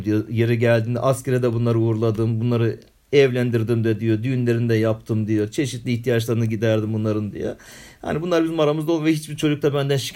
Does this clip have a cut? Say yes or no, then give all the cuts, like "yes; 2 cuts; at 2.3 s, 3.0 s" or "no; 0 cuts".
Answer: no; 0 cuts